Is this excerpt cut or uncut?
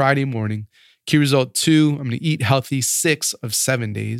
uncut